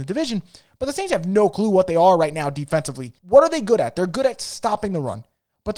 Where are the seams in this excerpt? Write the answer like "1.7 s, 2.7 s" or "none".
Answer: 3.2 s

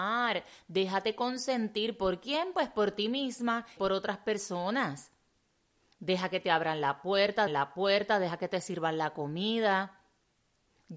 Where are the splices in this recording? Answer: 3.8 s, 7.5 s

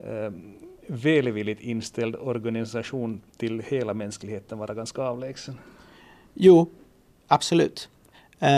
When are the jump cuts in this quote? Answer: 3.3 s

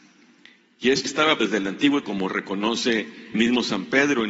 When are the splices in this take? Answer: 1.1 s, 1.4 s, 2.0 s, 3.3 s

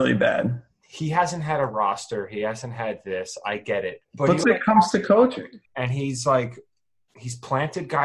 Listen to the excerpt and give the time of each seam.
4.0 s, 4.4 s, 5.7 s

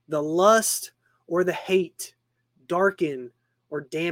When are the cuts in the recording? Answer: none

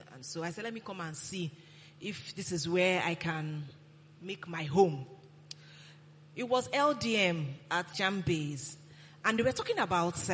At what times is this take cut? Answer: 7.9 s

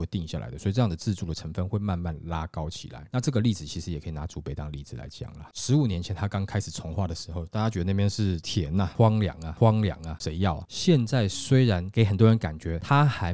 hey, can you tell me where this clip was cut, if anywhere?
9.6 s

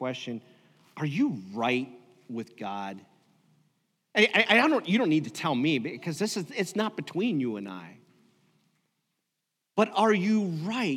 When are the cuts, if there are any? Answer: none

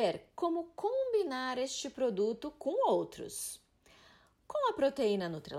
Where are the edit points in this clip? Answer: none

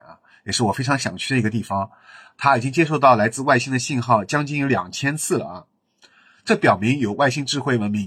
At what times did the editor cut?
none

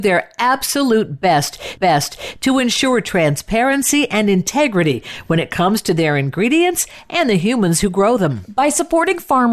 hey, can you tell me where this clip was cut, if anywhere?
1.8 s

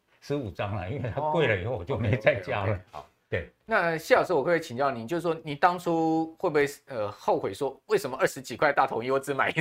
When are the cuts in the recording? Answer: none

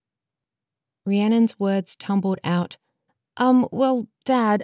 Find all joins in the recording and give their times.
3.1 s

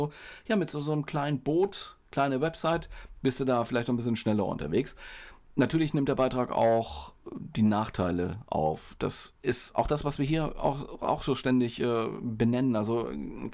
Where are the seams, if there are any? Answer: 2.0 s

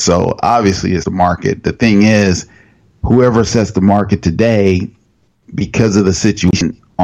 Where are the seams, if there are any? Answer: 1.0 s

